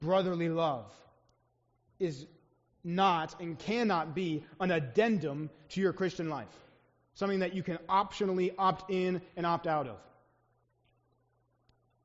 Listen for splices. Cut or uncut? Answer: uncut